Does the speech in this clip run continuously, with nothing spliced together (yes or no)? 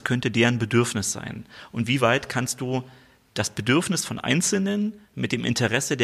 yes